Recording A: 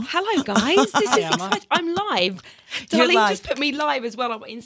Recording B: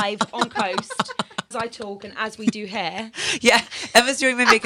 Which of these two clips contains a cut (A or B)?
B